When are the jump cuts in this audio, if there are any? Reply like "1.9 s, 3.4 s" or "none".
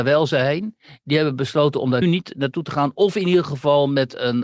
2.0 s

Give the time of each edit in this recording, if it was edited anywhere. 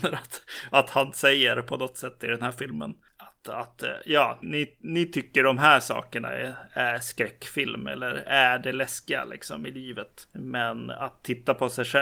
4.4 s

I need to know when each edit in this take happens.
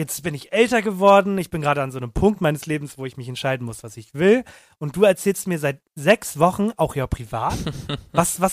none

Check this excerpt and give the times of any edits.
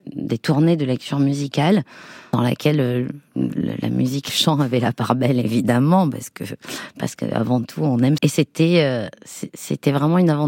2.3 s, 4.3 s, 8.2 s

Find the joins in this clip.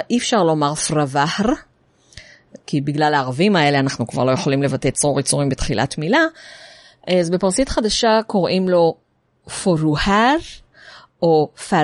none

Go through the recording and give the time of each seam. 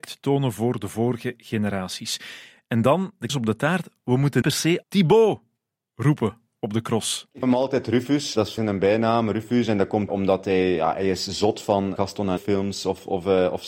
3.3 s, 4.4 s, 4.8 s, 7.4 s, 8.6 s, 10.1 s, 12.0 s, 12.4 s

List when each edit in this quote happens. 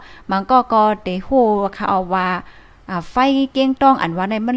none

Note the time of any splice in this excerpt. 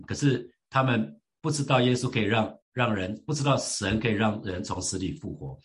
2.6 s

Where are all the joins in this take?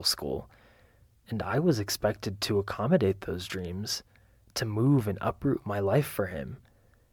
none

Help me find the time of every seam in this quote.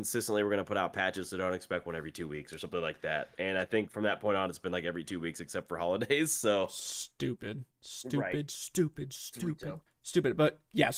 7.7 s, 9.9 s

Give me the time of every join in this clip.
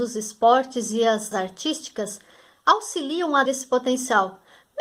1.3 s, 3.5 s

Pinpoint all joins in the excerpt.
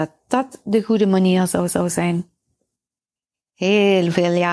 1.7 s

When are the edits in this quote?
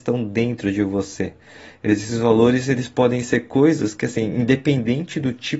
none

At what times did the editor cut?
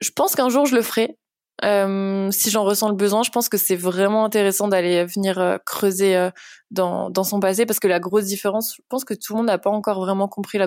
none

